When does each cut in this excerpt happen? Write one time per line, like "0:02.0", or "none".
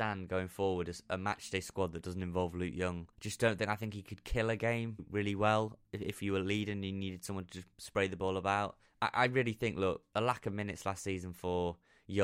0:03.1
0:05.0
0:08.8
0:10.1